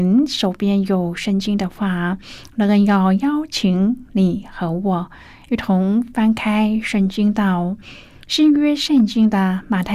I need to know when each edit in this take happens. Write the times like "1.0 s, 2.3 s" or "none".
none